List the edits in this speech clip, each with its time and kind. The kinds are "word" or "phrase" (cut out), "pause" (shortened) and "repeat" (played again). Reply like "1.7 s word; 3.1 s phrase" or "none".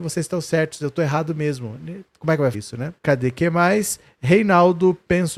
2.1 s pause; 2.5 s word; 3.0 s pause

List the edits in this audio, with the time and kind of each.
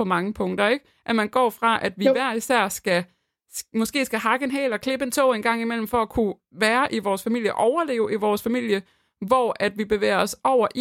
none

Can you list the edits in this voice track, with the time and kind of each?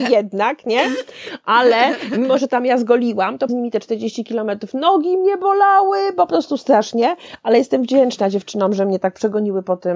3.5 s word

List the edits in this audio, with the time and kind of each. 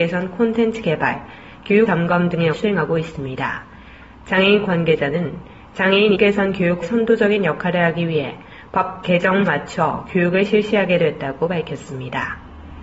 1.9 s word; 2.5 s word; 4.6 s word; 6.1 s word; 6.8 s word; 9.5 s word

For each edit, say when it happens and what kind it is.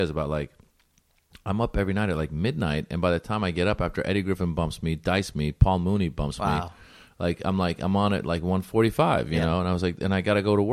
5.3 s word

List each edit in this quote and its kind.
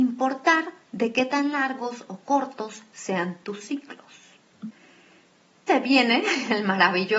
5.7 s word

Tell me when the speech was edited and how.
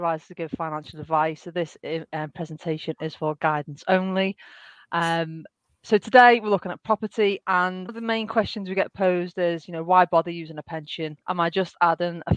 7.9 s word; 11.2 s pause

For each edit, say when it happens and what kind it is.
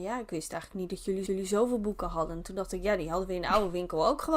1.3 s repeat

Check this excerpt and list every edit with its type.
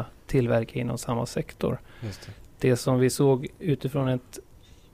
none

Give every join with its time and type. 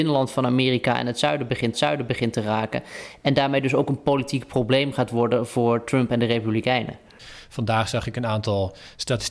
1.7 s repeat

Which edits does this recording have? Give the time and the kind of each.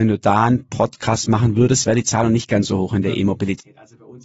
none

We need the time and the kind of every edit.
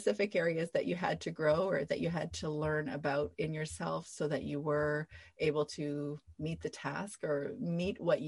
none

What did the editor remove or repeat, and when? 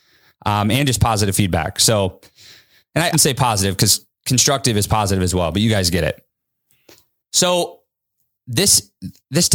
3.1 s phrase

